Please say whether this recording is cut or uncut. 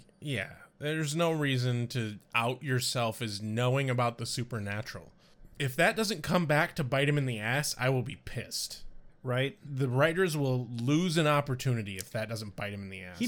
uncut